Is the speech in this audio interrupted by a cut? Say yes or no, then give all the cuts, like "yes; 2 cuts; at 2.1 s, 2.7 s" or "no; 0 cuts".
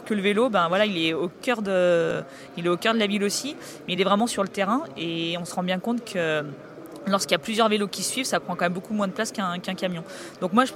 no; 0 cuts